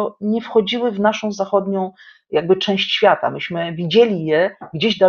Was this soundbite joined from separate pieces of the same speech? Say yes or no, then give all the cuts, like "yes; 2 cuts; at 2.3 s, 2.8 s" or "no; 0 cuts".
no; 0 cuts